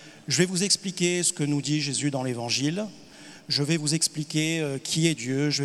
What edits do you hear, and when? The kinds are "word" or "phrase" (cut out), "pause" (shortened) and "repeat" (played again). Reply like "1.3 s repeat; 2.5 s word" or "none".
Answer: none